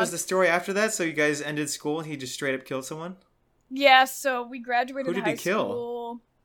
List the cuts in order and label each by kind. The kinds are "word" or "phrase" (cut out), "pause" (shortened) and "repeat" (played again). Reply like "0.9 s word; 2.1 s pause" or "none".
none